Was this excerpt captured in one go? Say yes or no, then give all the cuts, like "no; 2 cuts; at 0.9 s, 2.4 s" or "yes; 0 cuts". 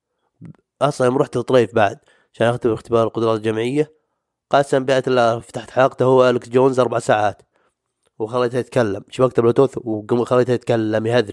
yes; 0 cuts